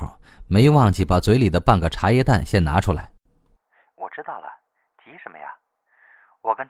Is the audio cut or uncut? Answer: uncut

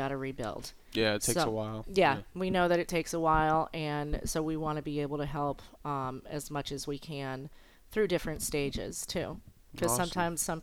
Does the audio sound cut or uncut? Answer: uncut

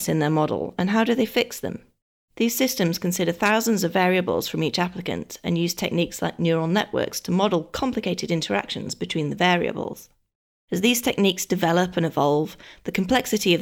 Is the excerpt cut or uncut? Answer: uncut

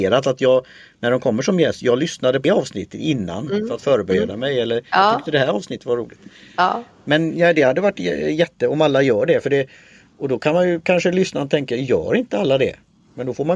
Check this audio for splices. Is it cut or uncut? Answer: cut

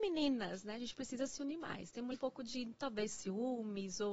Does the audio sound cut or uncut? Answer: cut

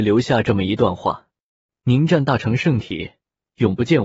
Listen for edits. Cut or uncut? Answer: uncut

